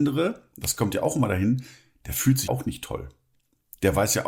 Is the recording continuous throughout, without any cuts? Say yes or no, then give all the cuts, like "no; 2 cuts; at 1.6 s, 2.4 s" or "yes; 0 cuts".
no; 1 cut; at 2.5 s